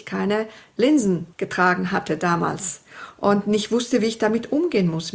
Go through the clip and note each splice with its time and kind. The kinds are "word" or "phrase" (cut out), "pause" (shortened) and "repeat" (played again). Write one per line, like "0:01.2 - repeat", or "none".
0:01.3 - pause